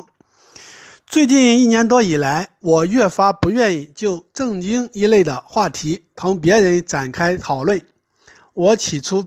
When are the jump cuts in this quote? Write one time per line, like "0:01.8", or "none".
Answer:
none